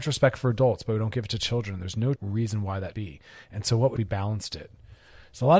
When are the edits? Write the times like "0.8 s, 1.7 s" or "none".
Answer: 2.2 s, 2.9 s, 4.0 s